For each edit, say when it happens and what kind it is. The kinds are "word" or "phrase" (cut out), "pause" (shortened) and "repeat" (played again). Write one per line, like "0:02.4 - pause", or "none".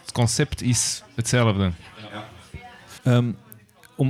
0:03.0 - pause